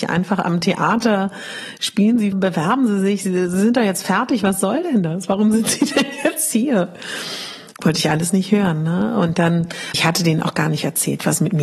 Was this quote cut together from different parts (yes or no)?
yes